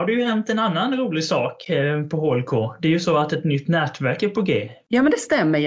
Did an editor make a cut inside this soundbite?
no; 0 cuts

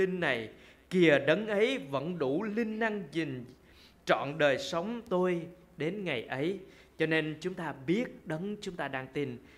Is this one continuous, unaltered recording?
yes; 0 cuts

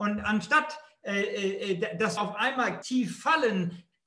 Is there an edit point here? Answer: yes; 2 cuts; at 2.2 s, 2.8 s

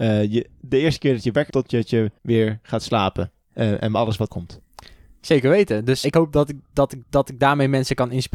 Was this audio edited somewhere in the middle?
yes; 5 cuts; at 1.5 s, 2.2 s, 4.3 s, 6.0 s, 7.0 s

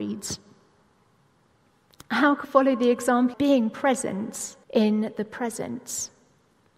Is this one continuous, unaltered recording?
no; 3 cuts; at 2.4 s, 3.3 s, 4.6 s

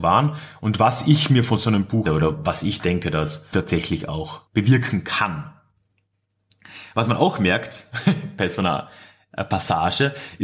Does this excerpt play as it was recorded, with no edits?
no; 3 cuts; at 2.1 s, 3.5 s, 4.5 s

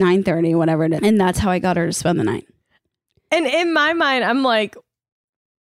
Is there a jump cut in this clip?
yes; 1 cut; at 1.0 s

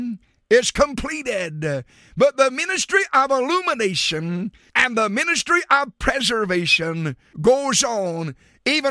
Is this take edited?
no; 0 cuts

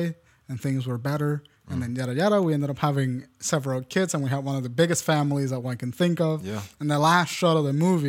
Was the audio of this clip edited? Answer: no; 0 cuts

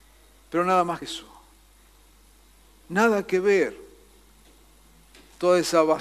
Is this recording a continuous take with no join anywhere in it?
no; 1 cut; at 1.0 s

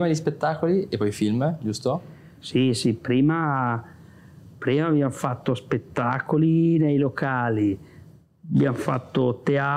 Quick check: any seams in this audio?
no; 0 cuts

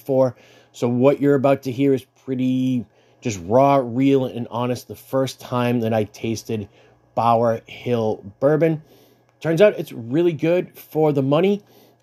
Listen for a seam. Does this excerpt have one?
no; 0 cuts

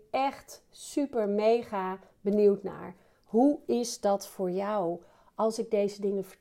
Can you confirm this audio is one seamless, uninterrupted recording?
yes; 0 cuts

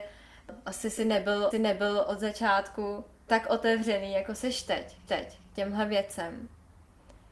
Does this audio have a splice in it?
yes; 3 cuts; at 1.5 s, 3.3 s, 5.1 s

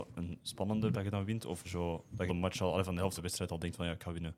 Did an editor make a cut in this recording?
yes; 4 cuts; at 0.9 s, 1.6 s, 2.3 s, 3.2 s

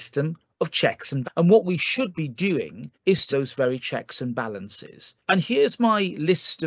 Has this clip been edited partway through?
yes; 4 cuts; at 1.2 s, 2.9 s, 3.3 s, 5.2 s

